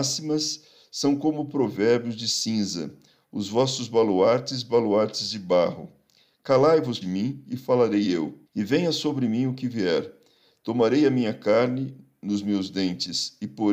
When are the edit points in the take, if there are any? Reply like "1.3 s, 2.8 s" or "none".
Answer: 7.0 s, 8.5 s